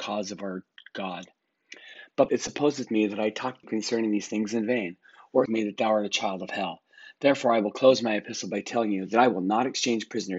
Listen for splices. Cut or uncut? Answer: cut